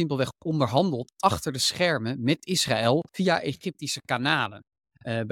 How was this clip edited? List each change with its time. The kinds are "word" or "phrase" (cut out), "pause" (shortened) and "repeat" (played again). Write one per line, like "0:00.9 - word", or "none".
0:03.1 - pause